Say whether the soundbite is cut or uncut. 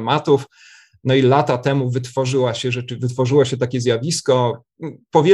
uncut